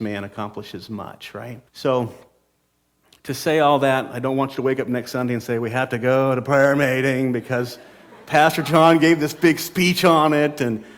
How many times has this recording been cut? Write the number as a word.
one